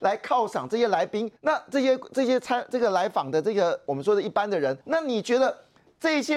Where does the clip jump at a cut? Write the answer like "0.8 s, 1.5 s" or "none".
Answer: 1.4 s, 4.8 s